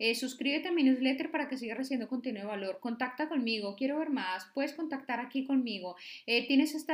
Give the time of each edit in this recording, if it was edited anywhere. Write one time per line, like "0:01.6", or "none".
none